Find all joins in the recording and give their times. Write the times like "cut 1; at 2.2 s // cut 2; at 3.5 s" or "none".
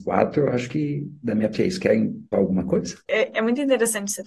cut 1; at 1.5 s // cut 2; at 2.3 s // cut 3; at 3.0 s